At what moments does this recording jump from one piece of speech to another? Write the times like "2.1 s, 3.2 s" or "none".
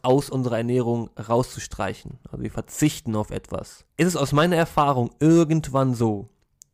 3.9 s